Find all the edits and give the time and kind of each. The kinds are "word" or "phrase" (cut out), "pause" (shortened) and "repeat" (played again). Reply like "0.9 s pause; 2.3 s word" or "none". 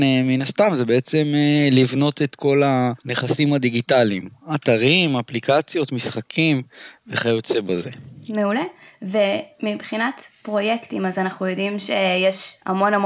none